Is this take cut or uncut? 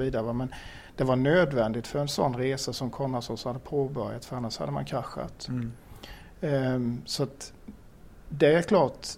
uncut